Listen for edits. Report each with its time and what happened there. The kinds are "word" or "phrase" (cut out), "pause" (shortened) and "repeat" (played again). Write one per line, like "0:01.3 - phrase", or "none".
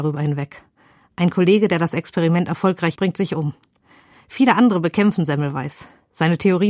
0:02.9 - word